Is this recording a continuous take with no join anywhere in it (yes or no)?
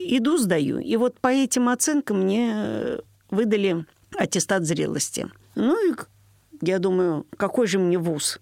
yes